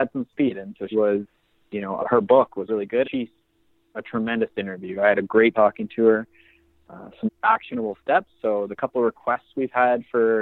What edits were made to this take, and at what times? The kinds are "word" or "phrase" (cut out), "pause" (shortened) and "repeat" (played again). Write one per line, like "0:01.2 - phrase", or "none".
0:00.9 - word
0:02.0 - word
0:02.7 - word
0:03.0 - word
0:05.5 - word
0:07.3 - word